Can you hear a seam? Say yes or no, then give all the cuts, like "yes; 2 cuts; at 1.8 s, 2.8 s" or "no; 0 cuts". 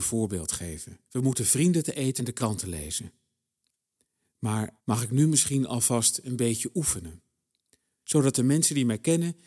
yes; 3 cuts; at 1.1 s, 2.2 s, 4.8 s